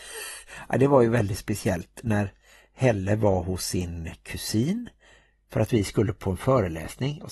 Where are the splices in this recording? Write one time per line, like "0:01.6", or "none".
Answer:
none